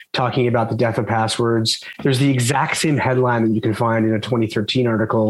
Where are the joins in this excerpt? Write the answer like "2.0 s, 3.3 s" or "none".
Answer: none